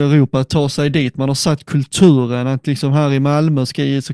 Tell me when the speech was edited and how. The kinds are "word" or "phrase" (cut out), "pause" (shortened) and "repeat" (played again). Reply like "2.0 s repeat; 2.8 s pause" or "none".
none